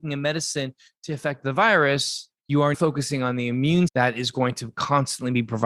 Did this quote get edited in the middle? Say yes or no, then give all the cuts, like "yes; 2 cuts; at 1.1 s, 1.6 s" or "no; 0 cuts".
yes; 3 cuts; at 2.4 s, 2.7 s, 3.9 s